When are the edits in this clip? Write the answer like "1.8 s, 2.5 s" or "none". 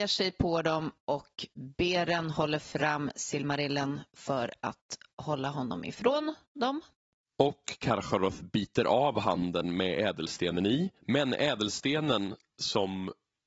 11.0 s